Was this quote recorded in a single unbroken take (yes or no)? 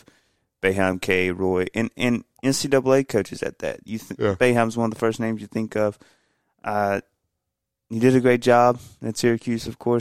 yes